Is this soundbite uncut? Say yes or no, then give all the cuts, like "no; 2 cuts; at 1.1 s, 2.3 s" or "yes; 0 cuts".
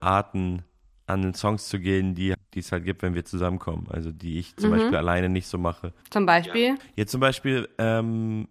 no; 1 cut; at 2.3 s